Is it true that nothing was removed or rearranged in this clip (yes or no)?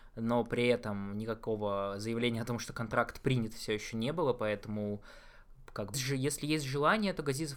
no